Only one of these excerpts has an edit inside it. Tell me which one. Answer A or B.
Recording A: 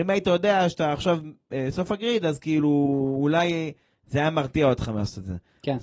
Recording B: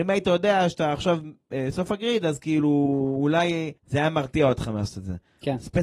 B